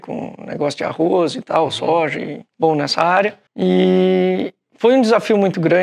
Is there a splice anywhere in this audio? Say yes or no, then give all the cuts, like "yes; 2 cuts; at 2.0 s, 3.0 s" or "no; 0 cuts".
yes; 2 cuts; at 2.5 s, 3.5 s